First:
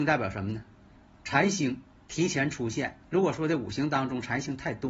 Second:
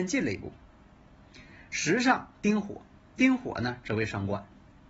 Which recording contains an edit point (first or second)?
first